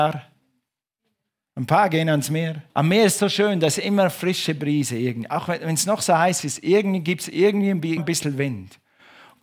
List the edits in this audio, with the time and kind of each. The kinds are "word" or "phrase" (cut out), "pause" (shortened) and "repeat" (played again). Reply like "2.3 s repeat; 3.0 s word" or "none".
2.7 s pause; 8.0 s word